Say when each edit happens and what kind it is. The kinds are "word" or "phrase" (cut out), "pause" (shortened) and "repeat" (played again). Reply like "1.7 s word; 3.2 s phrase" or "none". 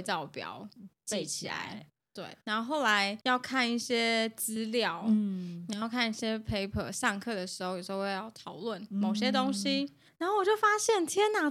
2.4 s pause; 3.2 s pause; 10.1 s pause